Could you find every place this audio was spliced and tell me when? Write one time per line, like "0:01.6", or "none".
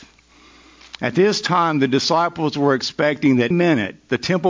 0:03.5